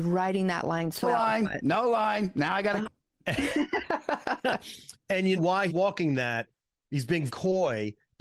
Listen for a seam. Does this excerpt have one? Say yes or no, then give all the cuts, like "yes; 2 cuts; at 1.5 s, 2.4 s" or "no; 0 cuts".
yes; 5 cuts; at 1.0 s, 2.8 s, 5.4 s, 5.7 s, 7.3 s